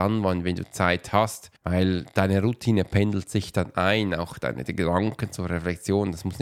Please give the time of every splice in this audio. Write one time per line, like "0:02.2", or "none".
0:01.6